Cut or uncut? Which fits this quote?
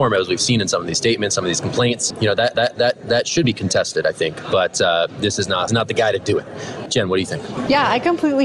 cut